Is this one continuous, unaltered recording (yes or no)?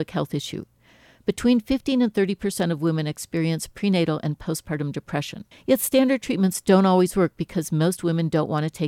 no